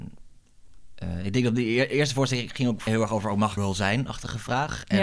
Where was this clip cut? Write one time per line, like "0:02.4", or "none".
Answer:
0:02.9
0:03.6